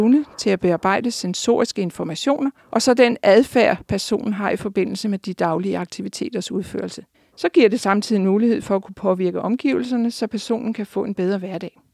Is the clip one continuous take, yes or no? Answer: no